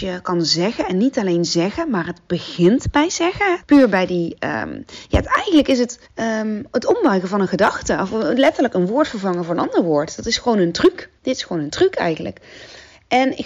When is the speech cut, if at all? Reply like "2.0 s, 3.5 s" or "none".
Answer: 3.6 s, 6.1 s, 11.2 s

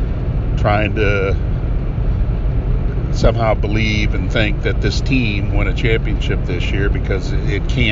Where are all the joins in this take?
5.5 s

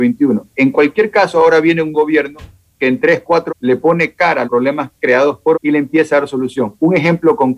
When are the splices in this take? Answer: 1.9 s, 3.5 s, 4.4 s, 5.5 s

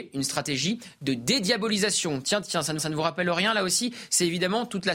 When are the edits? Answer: 2.8 s

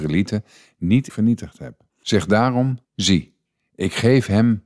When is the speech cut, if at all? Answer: 1.1 s, 1.9 s, 2.8 s

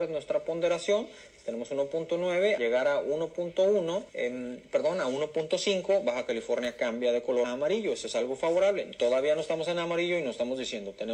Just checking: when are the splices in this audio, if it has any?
2.6 s, 4.1 s, 7.4 s

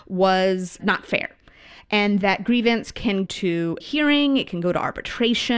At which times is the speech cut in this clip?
2.2 s, 3.3 s, 3.8 s

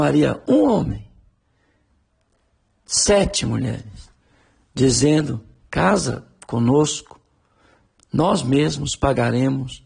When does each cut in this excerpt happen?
none

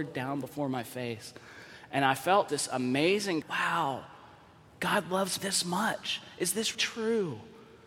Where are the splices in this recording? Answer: 2.5 s, 3.4 s, 5.4 s, 6.7 s

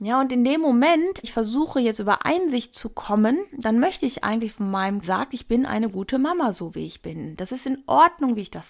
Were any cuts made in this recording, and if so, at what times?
1.2 s, 5.0 s

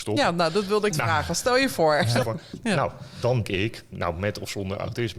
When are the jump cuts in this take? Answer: 0.9 s, 2.2 s, 3.4 s

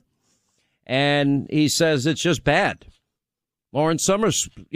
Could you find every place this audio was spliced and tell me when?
none

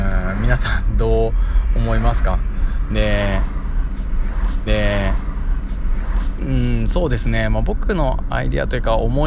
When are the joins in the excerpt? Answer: 4.7 s

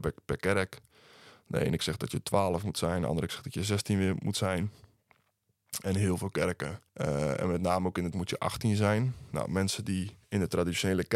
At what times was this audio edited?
1.8 s, 3.3 s, 6.9 s, 8.1 s, 10.2 s

